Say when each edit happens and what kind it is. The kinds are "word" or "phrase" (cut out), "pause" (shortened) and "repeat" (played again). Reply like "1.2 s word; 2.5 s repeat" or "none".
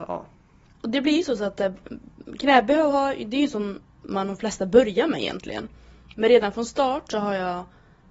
none